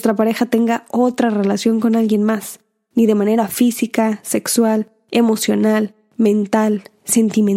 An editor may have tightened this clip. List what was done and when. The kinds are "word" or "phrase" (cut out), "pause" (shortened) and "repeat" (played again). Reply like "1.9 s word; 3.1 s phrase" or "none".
none

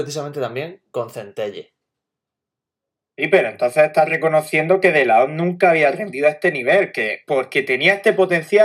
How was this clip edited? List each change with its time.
none

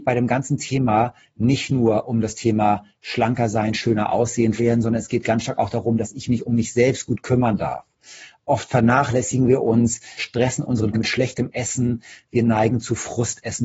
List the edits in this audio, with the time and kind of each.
4.6 s word; 10.2 s word; 10.9 s word

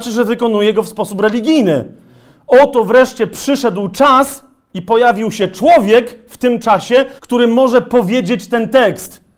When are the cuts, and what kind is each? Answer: 7.2 s pause

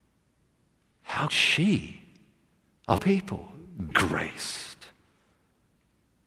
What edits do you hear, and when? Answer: 1.3 s word; 3.0 s word; 3.9 s word

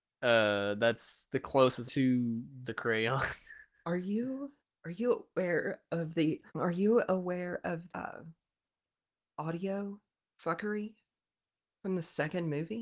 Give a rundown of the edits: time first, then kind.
1.8 s phrase; 2.6 s word; 4.6 s pause; 6.5 s pause; 7.9 s word; 10.1 s pause

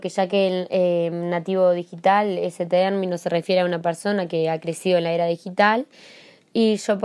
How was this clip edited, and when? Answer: none

